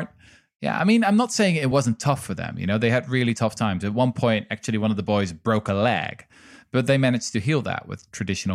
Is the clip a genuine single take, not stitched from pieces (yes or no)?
yes